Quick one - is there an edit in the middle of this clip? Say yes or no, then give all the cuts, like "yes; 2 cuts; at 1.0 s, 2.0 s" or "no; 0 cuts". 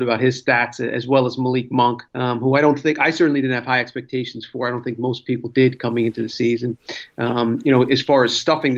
yes; 1 cut; at 2.1 s